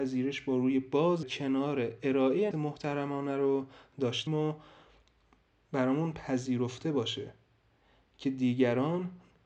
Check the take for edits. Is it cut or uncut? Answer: cut